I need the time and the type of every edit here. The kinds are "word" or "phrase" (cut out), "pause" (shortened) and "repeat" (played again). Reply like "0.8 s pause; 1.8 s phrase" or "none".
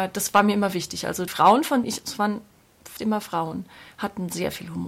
1.3 s word; 1.8 s word; 3.0 s word

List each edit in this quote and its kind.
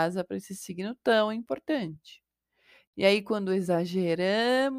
none

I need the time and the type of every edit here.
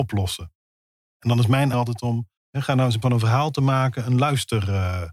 1.7 s word; 2.4 s pause; 3.0 s word

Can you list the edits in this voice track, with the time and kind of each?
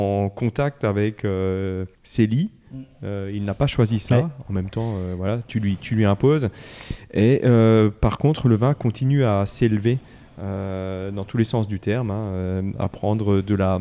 1.9 s pause

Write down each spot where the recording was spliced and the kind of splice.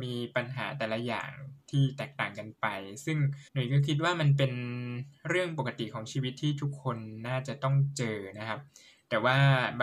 3.5 s pause

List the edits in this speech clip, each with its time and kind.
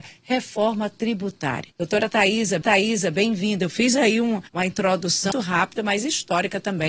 1.7 s pause; 2.6 s repeat; 4.5 s pause; 5.3 s word

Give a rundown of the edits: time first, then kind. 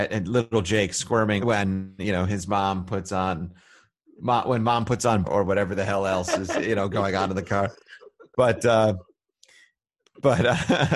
1.4 s word; 5.2 s word

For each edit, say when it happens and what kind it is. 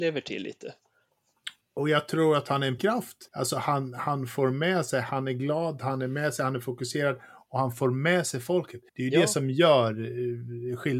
1.6 s pause; 2.8 s word; 3.3 s pause; 8.9 s pause

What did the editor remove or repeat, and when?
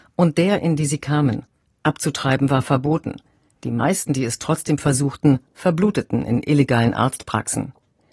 none

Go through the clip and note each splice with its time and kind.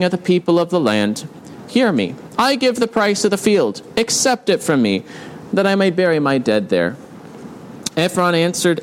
1.7 s phrase

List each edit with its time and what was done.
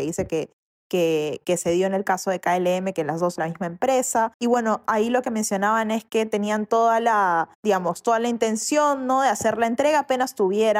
3.4 s word; 4.3 s pause; 7.5 s pause

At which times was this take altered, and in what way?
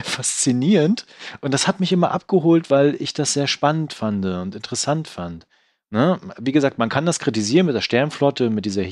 none

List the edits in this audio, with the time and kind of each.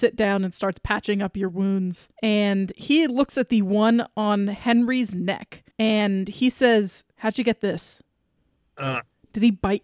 2.1 s pause; 5.7 s pause; 7.1 s pause

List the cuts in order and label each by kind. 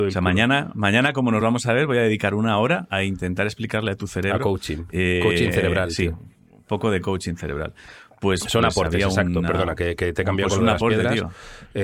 none

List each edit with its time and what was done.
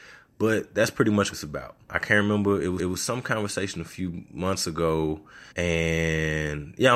1.3 s word; 1.9 s word; 2.8 s repeat; 5.5 s pause

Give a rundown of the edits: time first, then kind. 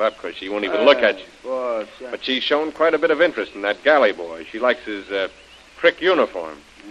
none

